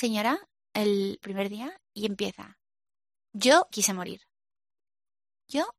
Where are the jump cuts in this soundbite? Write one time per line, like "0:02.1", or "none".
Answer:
0:01.2
0:01.8
0:03.7